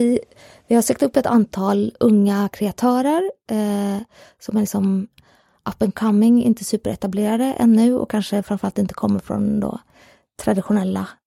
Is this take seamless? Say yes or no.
yes